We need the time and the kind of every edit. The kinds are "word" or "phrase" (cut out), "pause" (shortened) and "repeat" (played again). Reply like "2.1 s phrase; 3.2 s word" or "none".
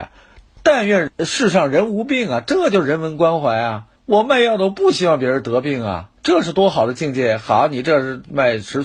4.0 s pause; 6.2 s pause